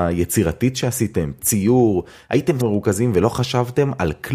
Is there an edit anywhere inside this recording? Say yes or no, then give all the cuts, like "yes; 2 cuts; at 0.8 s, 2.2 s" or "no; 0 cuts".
yes; 2 cuts; at 1.4 s, 2.6 s